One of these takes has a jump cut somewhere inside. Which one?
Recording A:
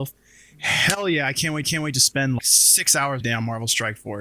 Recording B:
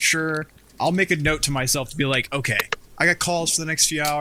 A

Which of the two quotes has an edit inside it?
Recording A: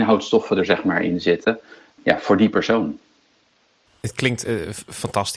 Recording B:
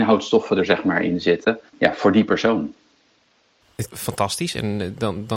B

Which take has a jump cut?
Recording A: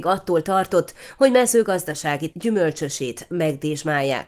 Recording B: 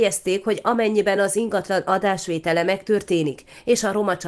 A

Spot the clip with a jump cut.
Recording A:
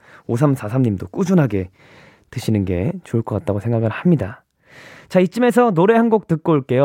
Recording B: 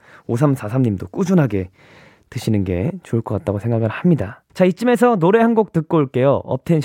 B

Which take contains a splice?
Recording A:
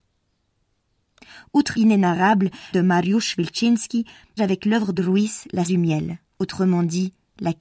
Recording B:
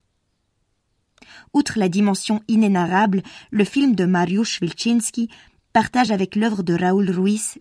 A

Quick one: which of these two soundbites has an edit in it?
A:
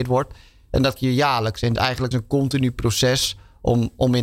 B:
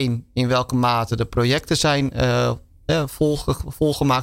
A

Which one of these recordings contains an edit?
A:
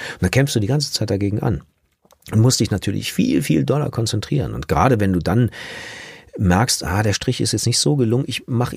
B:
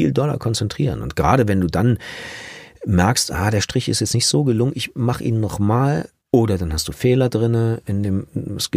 B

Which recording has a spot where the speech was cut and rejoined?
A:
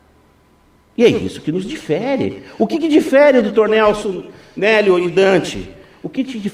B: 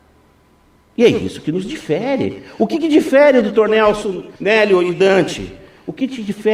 B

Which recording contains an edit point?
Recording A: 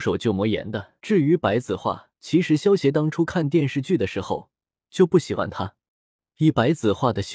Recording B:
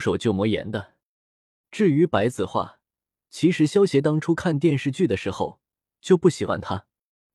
A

